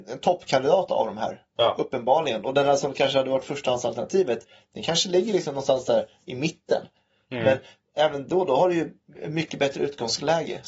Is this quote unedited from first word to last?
yes; 0 cuts

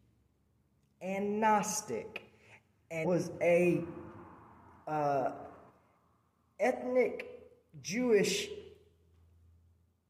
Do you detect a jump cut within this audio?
yes; 1 cut; at 3.0 s

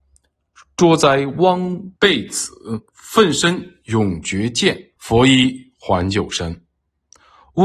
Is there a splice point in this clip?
yes; 3 cuts; at 2.0 s, 2.9 s, 5.0 s

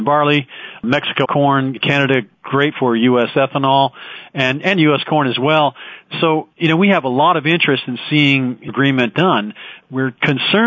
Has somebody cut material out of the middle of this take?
yes; 5 cuts; at 1.2 s, 2.7 s, 6.5 s, 8.7 s, 9.1 s

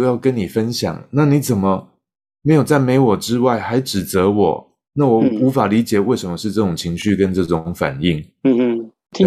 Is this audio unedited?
yes; 0 cuts

